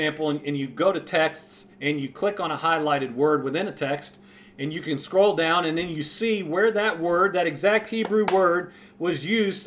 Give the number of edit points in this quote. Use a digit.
1